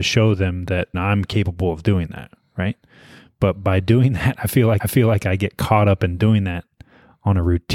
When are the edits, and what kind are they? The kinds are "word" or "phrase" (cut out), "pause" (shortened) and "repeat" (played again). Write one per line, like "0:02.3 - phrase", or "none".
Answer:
0:00.9 - word
0:04.8 - repeat